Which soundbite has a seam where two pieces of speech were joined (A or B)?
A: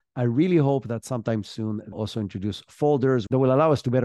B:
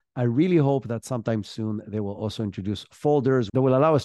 A